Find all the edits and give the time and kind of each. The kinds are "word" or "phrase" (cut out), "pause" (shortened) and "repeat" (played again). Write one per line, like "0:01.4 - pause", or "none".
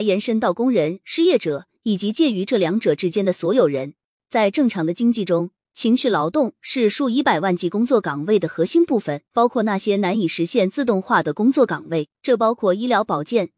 0:09.3 - pause
0:12.2 - pause